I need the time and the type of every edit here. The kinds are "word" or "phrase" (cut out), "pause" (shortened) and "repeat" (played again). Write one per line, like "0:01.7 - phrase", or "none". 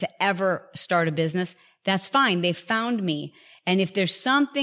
none

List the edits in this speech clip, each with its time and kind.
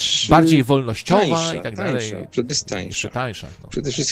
0:02.5 - word

